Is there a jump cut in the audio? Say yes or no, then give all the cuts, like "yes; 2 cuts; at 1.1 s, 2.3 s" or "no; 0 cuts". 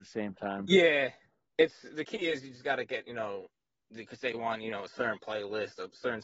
no; 0 cuts